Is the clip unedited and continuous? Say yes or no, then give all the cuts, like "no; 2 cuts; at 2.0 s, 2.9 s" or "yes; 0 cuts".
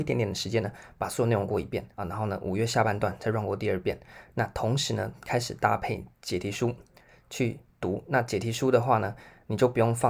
no; 3 cuts; at 1.5 s, 1.9 s, 6.1 s